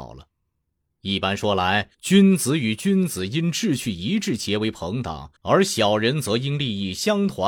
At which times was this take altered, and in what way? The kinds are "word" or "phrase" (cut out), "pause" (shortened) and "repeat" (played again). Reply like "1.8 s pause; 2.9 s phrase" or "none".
1.9 s pause; 5.4 s pause